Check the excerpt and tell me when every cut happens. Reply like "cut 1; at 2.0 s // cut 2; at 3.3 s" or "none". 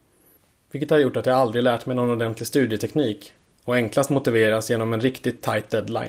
none